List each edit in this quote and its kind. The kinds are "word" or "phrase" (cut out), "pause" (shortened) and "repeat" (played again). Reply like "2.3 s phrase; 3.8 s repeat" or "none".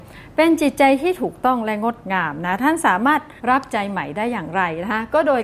3.4 s pause